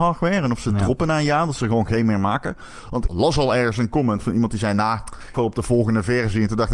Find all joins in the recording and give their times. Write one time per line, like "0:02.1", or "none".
0:03.1
0:05.3